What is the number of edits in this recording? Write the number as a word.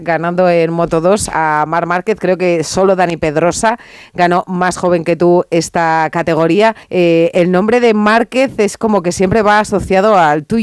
one